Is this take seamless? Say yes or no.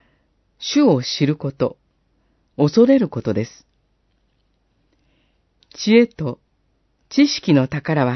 yes